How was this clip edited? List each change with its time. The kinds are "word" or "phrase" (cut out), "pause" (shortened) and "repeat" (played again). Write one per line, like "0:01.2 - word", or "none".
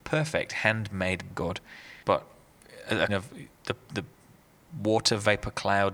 0:01.3 - word
0:02.0 - pause
0:03.1 - word